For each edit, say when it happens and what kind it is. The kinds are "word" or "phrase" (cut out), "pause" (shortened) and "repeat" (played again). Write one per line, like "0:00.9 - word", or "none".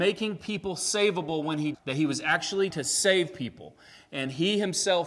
0:01.7 - word
0:02.7 - word